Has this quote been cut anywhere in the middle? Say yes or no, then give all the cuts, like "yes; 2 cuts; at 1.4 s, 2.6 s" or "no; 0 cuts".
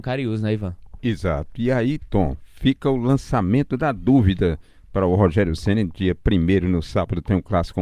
no; 0 cuts